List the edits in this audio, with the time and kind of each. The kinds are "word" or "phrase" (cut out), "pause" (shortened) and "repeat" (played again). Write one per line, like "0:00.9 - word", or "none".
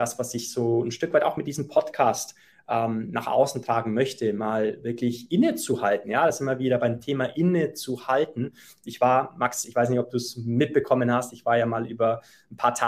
none